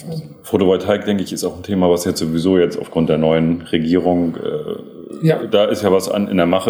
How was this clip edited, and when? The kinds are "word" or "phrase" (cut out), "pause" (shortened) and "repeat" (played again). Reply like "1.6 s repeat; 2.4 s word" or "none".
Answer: none